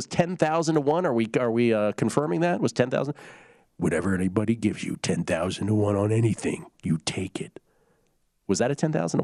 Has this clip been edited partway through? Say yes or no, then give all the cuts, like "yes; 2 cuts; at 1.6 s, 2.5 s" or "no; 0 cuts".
no; 0 cuts